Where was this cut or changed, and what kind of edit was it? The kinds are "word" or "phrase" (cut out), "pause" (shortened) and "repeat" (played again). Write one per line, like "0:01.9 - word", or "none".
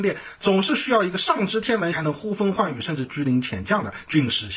0:01.9 - phrase